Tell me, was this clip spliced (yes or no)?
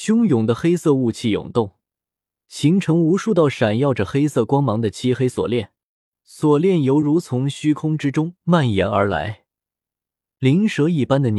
no